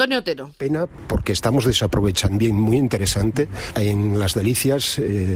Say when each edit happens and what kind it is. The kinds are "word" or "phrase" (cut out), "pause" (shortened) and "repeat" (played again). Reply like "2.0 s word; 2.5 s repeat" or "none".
2.4 s word